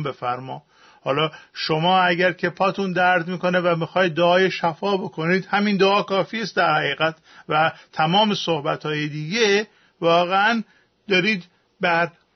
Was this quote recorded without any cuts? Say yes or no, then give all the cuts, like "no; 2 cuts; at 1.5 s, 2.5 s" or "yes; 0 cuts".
yes; 0 cuts